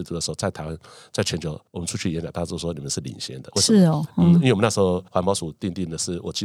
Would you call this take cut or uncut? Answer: cut